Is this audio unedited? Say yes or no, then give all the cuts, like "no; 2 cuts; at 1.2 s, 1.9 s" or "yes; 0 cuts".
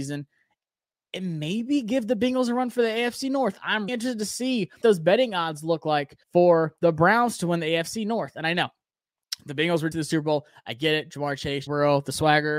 no; 5 cuts; at 3.9 s, 4.8 s, 6.2 s, 9.9 s, 11.7 s